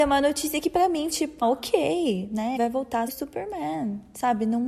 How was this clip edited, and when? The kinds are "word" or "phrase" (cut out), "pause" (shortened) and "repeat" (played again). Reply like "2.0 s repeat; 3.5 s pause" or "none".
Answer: 1.1 s word; 1.4 s word; 2.6 s word; 3.1 s word